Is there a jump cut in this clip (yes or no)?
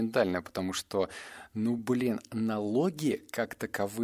no